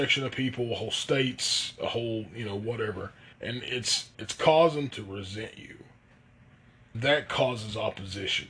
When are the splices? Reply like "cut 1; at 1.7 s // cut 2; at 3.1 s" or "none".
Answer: cut 1; at 3.3 s // cut 2; at 4.1 s // cut 3; at 4.9 s // cut 4; at 6.9 s